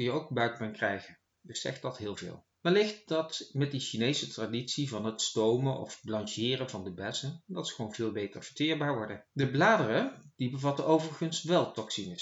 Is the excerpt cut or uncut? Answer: cut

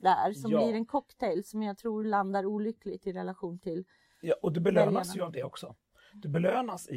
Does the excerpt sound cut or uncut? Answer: uncut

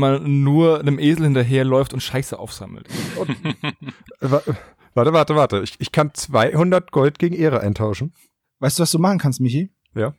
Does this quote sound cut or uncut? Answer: uncut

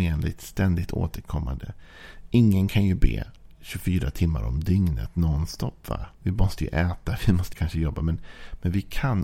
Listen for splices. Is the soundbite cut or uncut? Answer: cut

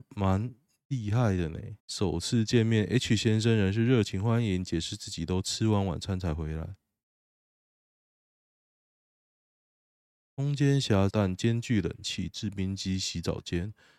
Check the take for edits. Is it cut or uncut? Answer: cut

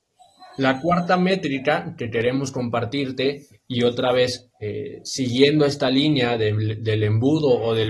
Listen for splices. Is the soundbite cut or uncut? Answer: uncut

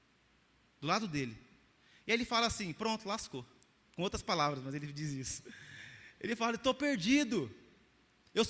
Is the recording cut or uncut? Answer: uncut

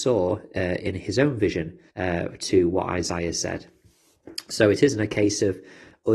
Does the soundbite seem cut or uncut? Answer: cut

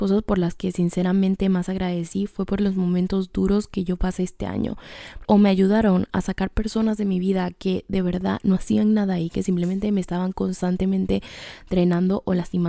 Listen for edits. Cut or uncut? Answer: cut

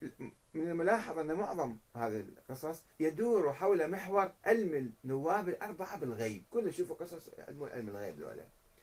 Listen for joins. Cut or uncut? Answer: cut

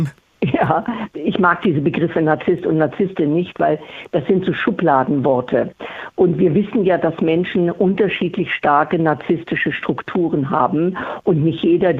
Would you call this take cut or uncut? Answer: uncut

